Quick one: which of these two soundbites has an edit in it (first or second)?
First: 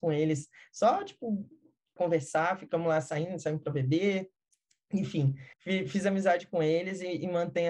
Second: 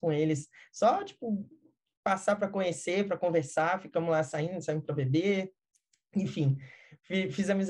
first